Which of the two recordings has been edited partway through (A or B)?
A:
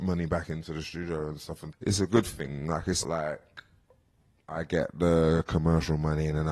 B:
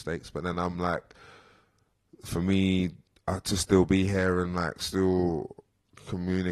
A